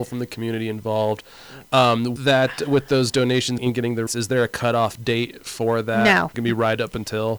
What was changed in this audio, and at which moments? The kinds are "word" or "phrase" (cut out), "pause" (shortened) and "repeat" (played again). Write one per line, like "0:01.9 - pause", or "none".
0:02.2 - word
0:03.6 - word
0:04.1 - word
0:06.3 - phrase